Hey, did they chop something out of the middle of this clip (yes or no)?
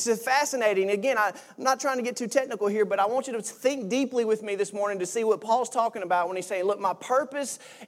no